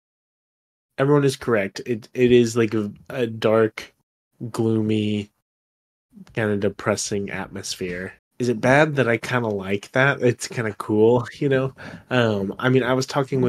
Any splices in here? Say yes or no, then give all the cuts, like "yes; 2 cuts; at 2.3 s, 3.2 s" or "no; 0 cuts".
yes; 1 cut; at 8.2 s